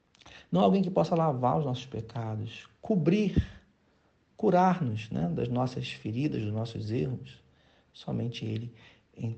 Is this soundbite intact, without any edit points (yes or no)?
yes